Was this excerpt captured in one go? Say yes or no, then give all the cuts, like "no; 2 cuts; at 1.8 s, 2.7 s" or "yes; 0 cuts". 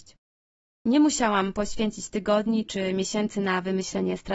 yes; 0 cuts